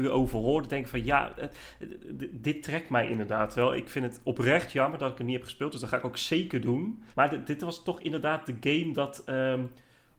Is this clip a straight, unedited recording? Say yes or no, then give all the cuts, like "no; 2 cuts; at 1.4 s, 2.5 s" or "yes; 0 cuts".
no; 1 cut; at 7.1 s